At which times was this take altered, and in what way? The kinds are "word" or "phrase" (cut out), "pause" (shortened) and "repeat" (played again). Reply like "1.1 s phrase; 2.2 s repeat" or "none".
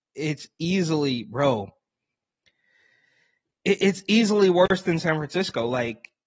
none